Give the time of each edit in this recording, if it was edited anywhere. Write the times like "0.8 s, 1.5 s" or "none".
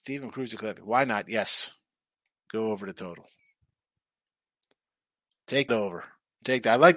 5.7 s